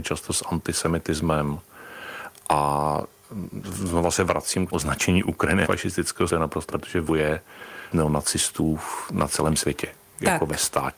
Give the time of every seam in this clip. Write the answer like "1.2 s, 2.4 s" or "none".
4.7 s, 5.6 s, 6.3 s, 6.7 s, 7.1 s, 7.9 s